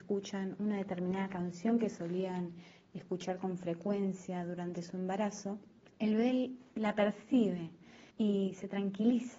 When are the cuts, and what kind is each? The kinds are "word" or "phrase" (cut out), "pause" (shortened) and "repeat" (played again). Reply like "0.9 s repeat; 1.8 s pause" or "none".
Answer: 5.8 s pause; 8.1 s pause